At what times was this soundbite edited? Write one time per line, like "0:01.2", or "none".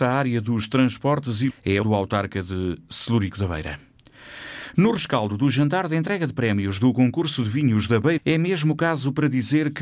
0:01.5
0:01.8
0:08.2